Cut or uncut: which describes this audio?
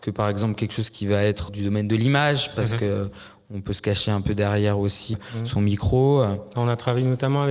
cut